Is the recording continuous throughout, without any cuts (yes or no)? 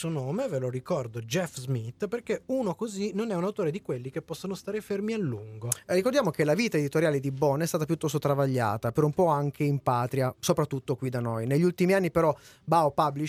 yes